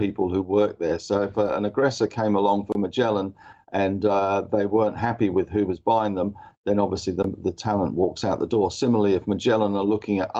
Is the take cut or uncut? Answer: uncut